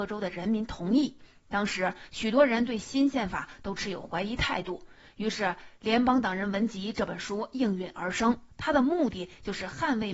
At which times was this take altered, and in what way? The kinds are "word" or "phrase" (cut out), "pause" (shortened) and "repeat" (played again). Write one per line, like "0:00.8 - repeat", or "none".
none